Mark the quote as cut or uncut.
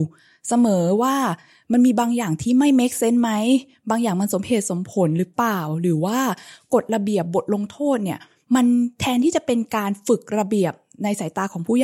uncut